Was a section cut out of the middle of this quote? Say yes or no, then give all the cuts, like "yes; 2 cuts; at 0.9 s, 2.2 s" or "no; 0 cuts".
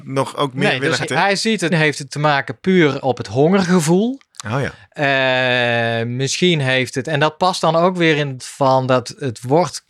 yes; 3 cuts; at 1.0 s, 1.7 s, 8.4 s